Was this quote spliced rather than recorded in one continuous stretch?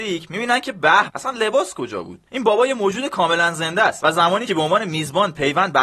yes; 3 cuts; at 1.1 s, 2.3 s, 4.5 s

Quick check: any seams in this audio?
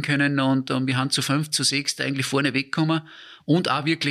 no; 0 cuts

